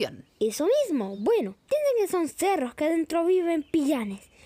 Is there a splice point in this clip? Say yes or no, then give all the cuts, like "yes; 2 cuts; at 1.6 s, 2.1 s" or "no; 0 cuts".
no; 0 cuts